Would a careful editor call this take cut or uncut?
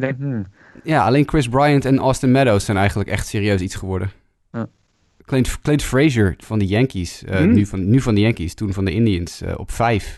cut